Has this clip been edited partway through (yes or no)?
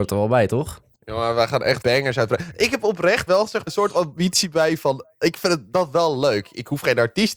yes